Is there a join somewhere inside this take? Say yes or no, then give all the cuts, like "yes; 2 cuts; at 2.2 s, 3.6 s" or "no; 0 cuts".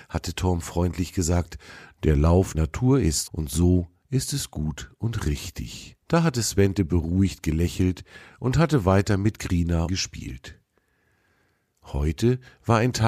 yes; 4 cuts; at 2.5 s, 3.3 s, 6.0 s, 9.9 s